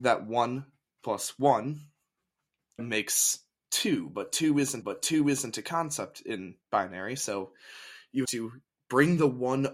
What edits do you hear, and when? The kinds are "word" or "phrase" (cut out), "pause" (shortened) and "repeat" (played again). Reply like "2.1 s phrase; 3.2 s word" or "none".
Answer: 2.8 s word; 4.8 s repeat; 6.6 s pause; 8.2 s word